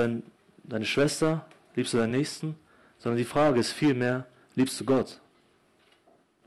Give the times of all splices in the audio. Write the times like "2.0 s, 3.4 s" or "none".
none